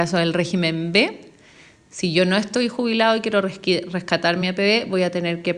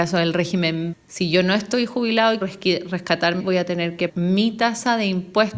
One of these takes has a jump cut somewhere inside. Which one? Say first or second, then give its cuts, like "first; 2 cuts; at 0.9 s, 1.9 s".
second; 4 cuts; at 0.9 s, 2.4 s, 3.4 s, 4.1 s